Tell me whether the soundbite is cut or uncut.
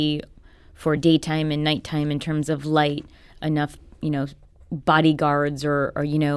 uncut